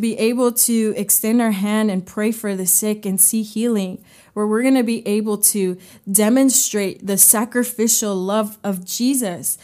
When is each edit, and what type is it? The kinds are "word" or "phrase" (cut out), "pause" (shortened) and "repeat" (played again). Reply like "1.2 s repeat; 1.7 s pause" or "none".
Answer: none